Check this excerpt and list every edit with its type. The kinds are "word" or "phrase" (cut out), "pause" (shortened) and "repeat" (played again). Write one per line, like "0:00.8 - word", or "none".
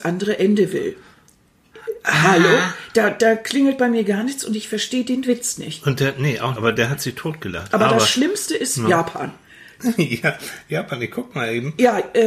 0:06.5 - word